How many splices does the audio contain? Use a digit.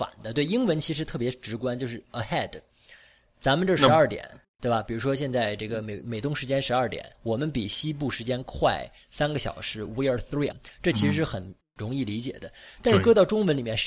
2